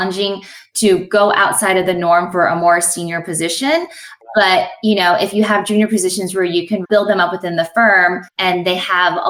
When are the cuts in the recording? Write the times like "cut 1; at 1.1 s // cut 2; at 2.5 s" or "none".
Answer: cut 1; at 6.8 s // cut 2; at 8.3 s